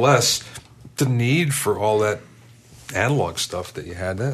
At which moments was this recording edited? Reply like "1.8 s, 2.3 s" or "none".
none